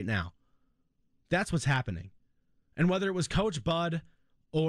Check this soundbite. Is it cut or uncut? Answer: uncut